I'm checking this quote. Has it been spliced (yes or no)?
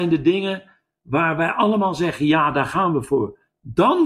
no